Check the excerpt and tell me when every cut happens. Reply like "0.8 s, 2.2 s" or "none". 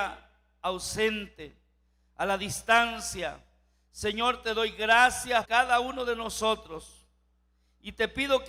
5.4 s